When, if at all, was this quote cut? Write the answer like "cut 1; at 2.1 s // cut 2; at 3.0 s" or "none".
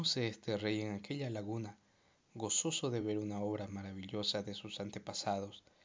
none